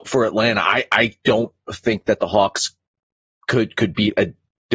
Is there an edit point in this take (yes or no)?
no